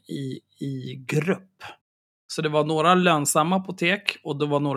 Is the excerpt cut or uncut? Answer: uncut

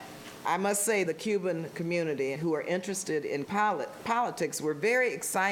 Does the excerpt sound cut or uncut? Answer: cut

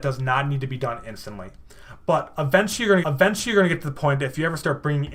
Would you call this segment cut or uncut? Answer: cut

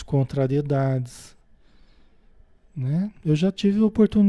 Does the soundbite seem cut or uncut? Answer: uncut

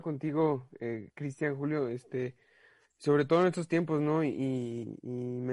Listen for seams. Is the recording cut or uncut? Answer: uncut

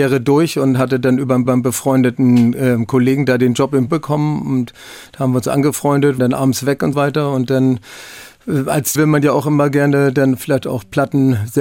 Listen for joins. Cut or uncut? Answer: cut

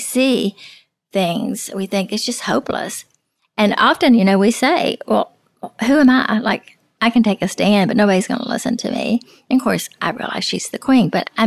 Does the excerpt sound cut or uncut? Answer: uncut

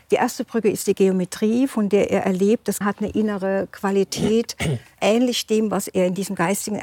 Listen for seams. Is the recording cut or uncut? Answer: cut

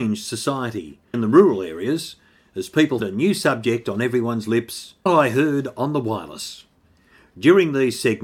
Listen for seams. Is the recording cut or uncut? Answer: cut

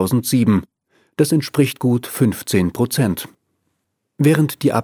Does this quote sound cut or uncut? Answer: uncut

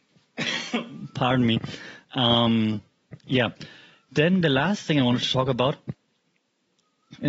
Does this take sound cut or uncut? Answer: cut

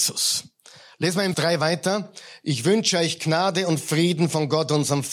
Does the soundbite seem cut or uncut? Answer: cut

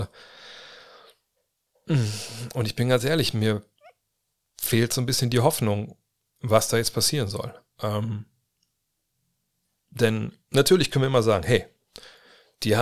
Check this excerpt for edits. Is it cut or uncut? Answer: uncut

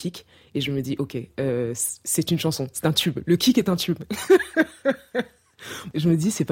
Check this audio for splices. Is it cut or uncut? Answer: uncut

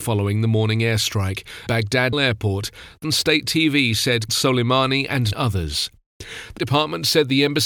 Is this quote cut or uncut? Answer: cut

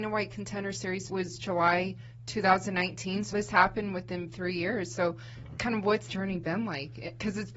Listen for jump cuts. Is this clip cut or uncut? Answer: cut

